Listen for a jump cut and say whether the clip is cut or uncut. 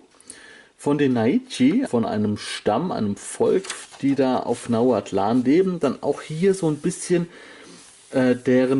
cut